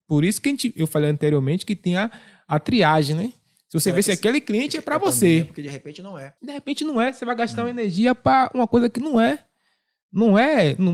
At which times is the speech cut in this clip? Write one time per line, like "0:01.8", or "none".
0:06.4